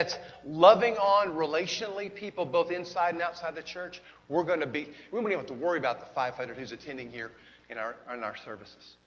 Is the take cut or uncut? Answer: uncut